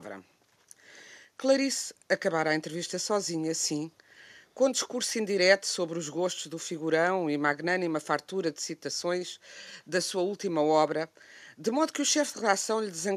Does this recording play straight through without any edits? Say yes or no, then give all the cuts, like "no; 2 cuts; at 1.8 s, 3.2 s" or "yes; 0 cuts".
yes; 0 cuts